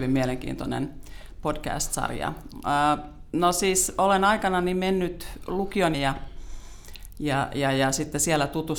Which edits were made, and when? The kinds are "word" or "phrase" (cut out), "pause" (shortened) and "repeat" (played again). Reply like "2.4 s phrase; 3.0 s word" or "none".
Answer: 5.9 s phrase